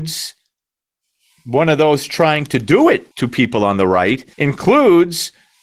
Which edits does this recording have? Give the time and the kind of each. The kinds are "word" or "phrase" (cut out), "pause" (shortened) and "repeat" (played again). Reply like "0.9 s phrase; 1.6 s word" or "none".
3.1 s pause; 4.3 s pause